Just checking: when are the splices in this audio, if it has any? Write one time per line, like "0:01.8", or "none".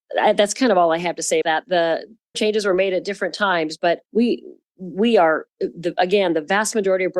0:01.4
0:02.3
0:04.1
0:05.5